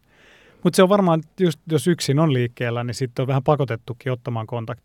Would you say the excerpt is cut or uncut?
uncut